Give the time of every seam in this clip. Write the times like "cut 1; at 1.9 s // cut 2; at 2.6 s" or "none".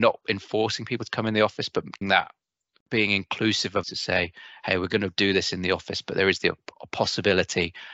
cut 1; at 2.0 s // cut 2; at 3.8 s